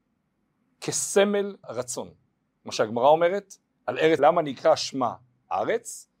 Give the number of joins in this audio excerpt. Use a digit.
3